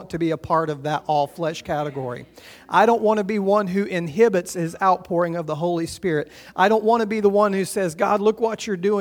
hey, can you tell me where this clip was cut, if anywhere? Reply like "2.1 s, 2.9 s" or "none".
none